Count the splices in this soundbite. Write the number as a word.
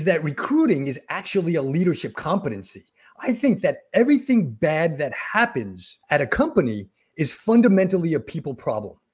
one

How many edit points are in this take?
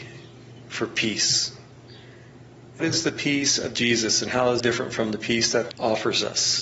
three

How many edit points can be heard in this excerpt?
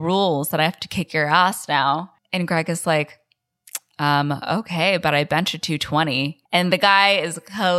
two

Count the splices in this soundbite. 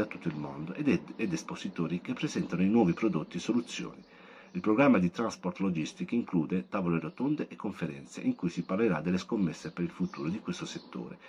zero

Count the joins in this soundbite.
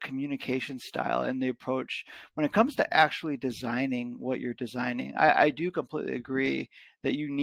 zero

